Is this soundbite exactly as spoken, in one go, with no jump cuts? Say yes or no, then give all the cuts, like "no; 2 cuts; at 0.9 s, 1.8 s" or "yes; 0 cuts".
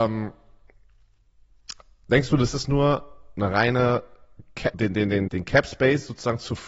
no; 2 cuts; at 4.7 s, 5.3 s